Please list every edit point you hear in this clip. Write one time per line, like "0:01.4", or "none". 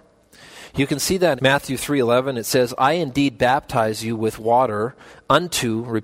0:01.4